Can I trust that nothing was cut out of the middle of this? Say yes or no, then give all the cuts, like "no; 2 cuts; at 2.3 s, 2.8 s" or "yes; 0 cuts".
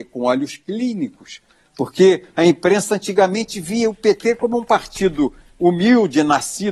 yes; 0 cuts